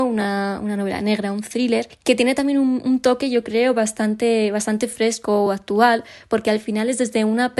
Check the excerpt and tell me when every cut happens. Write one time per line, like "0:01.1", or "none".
none